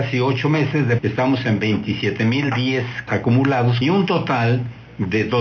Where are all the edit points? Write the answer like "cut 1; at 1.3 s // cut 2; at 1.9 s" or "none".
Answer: cut 1; at 1.0 s // cut 2; at 3.1 s // cut 3; at 3.8 s